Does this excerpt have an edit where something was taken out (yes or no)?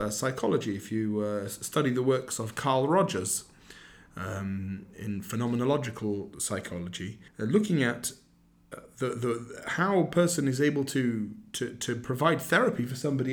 yes